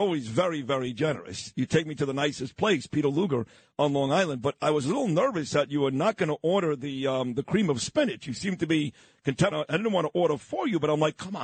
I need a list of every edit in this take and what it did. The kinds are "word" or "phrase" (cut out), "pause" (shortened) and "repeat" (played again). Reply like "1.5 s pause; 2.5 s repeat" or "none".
9.5 s phrase